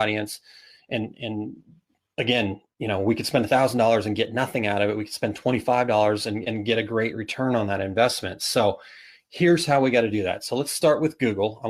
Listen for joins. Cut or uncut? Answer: uncut